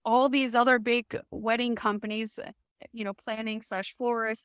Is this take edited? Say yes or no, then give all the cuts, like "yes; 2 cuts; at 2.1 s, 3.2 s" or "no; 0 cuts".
no; 0 cuts